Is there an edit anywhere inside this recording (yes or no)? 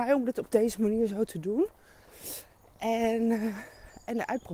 no